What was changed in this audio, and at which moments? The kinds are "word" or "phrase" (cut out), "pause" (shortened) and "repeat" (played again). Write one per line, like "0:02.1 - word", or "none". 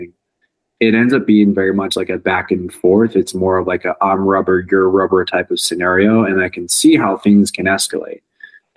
none